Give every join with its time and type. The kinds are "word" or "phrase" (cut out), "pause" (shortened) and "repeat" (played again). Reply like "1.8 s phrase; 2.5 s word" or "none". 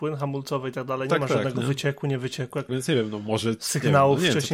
2.7 s word